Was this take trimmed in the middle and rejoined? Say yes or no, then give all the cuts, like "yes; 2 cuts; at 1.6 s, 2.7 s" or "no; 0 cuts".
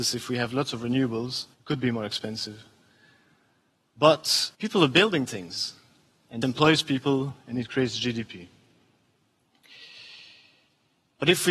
yes; 3 cuts; at 1.5 s, 4.5 s, 6.4 s